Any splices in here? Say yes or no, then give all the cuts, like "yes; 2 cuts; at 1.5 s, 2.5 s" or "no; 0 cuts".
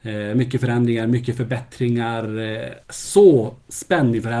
yes; 1 cut; at 2.8 s